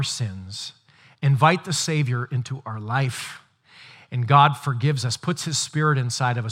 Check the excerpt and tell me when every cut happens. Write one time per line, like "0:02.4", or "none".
none